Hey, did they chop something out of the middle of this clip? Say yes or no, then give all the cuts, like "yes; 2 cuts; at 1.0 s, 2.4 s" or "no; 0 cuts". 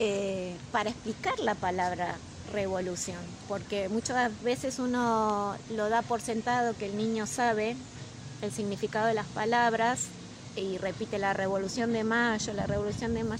no; 0 cuts